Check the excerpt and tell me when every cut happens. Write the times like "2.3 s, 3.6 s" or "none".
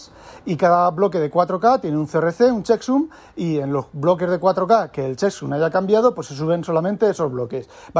none